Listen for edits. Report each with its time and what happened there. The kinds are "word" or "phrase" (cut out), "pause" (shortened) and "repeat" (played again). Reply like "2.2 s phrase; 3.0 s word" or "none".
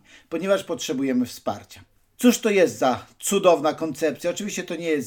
2.0 s pause